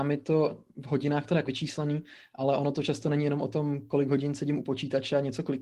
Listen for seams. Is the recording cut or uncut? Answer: cut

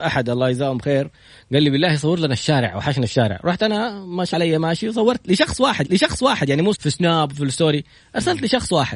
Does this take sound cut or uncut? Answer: cut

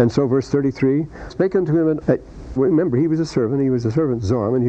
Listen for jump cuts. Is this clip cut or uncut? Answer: cut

